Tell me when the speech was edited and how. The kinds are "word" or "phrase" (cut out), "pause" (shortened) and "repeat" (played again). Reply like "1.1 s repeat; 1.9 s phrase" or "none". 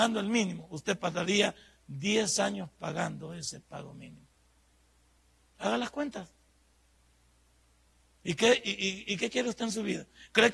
none